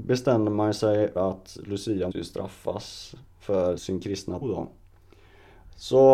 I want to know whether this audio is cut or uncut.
cut